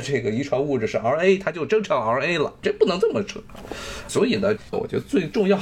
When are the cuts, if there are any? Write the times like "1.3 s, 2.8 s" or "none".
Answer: none